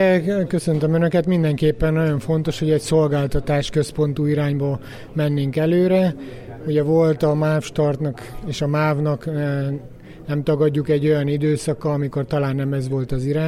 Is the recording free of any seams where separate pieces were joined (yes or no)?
yes